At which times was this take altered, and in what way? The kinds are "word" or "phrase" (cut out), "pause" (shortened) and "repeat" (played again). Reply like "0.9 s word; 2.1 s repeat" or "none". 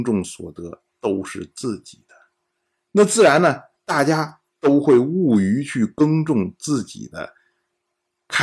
none